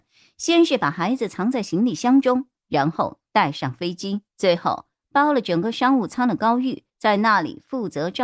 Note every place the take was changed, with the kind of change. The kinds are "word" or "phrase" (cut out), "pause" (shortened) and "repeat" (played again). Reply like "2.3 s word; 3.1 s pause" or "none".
4.3 s pause; 6.9 s pause